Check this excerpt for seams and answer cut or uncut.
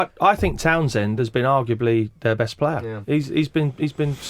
uncut